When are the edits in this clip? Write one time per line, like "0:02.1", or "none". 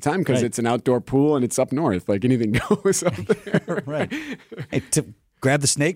none